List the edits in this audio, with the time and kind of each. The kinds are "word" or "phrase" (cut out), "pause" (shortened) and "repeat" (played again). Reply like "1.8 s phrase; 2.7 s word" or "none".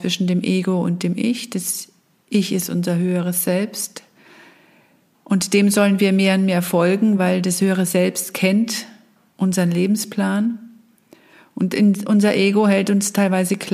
none